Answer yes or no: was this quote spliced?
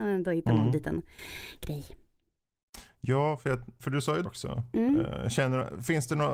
yes